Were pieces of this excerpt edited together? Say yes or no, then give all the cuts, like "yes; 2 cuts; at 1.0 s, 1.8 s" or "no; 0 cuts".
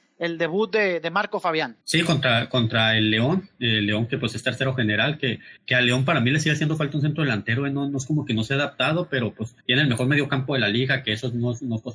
yes; 3 cuts; at 1.8 s, 5.6 s, 9.6 s